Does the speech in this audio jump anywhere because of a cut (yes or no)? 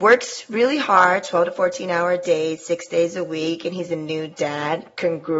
no